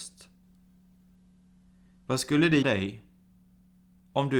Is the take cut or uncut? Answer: cut